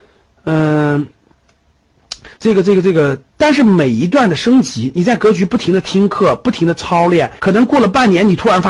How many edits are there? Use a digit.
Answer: 3